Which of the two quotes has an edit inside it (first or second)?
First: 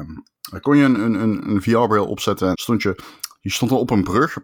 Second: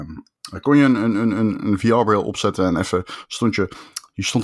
first